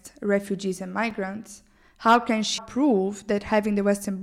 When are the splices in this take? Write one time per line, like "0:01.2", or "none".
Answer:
0:02.6